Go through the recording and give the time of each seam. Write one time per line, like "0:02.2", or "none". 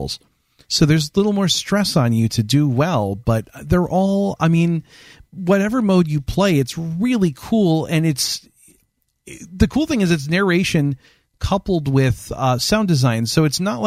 none

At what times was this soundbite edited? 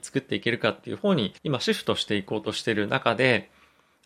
0:01.4

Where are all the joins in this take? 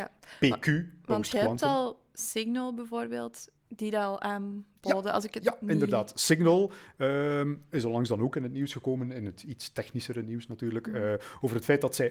0:03.6

